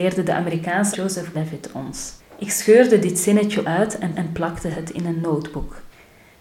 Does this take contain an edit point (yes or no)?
yes